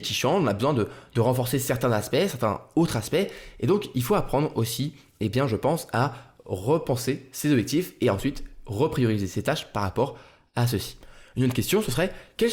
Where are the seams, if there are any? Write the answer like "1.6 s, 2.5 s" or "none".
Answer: none